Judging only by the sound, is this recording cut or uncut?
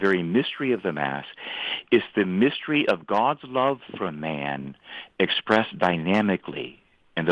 uncut